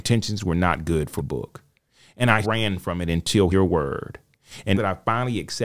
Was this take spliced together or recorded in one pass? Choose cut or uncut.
cut